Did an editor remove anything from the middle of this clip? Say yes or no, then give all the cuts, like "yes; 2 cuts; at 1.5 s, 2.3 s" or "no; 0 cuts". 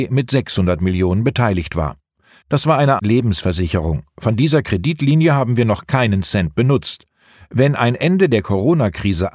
yes; 1 cut; at 3.0 s